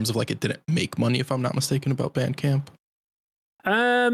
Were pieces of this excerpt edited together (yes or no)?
no